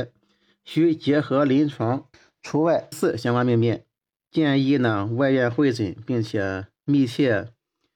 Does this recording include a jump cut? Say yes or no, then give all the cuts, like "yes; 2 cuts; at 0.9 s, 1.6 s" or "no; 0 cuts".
yes; 3 cuts; at 2.1 s, 2.9 s, 4.0 s